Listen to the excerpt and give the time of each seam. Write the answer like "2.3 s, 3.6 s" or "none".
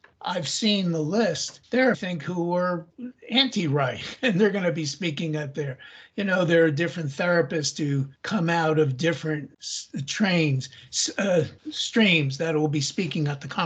1.9 s